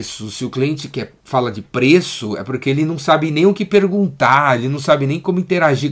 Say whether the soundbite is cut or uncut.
cut